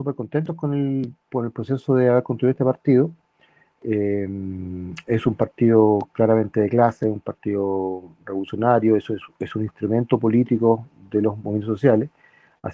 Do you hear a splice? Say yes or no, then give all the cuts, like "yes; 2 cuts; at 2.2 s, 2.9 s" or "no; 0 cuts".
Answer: no; 0 cuts